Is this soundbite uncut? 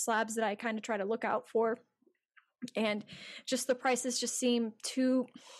yes; 0 cuts

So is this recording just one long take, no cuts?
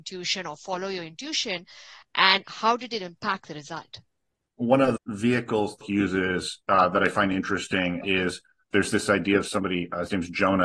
no; 3 cuts; at 5.0 s, 5.8 s, 8.0 s

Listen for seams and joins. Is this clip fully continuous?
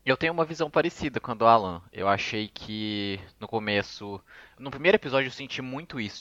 yes; 0 cuts

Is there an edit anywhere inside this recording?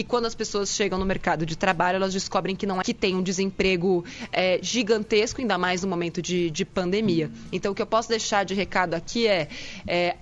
yes; 1 cut; at 2.8 s

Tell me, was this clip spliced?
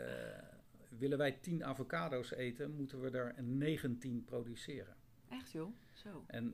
no; 0 cuts

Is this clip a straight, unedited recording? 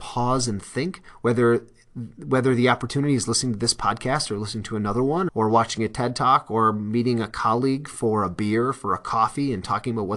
no; 1 cut; at 5.3 s

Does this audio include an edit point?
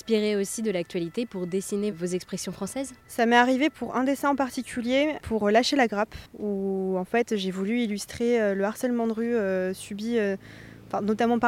yes; 2 cuts; at 3.0 s, 6.3 s

